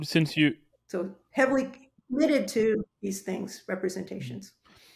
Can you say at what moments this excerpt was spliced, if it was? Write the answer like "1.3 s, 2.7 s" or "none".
2.0 s, 2.9 s